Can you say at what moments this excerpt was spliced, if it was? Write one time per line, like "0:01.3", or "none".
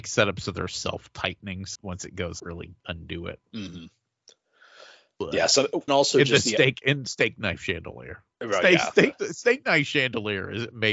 0:01.7
0:02.4
0:02.8
0:03.5
0:05.9
0:08.3